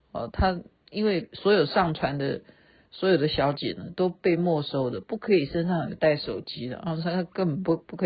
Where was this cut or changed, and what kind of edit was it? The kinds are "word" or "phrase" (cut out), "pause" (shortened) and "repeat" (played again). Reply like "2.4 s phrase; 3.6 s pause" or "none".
none